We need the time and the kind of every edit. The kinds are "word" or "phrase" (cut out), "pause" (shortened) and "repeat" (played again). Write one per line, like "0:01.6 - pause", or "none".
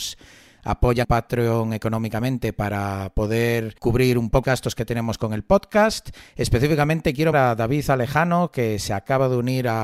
0:01.0 - word
0:03.8 - pause
0:04.4 - word
0:07.3 - word